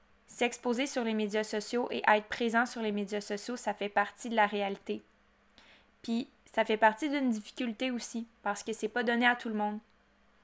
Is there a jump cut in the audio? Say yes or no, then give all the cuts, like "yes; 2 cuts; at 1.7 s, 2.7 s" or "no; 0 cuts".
no; 0 cuts